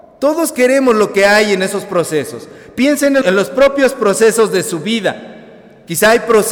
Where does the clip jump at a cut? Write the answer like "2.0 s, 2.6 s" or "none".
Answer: 3.2 s